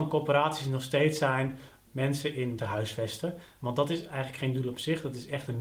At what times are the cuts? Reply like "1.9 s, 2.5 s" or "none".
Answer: 1.9 s, 2.6 s